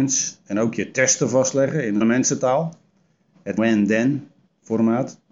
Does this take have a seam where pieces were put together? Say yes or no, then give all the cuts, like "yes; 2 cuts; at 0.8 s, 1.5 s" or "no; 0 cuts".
yes; 2 cuts; at 2.0 s, 3.6 s